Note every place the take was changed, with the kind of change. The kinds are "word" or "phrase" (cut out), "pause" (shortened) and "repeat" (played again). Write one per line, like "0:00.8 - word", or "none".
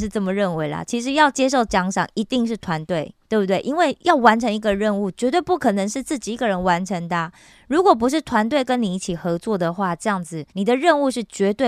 0:03.2 - pause
0:10.5 - pause